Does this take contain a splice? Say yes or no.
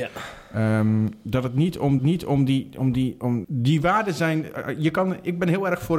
yes